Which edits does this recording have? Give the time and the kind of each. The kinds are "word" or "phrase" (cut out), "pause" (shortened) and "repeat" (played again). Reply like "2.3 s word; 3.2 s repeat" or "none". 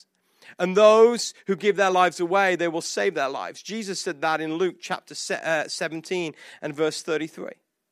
none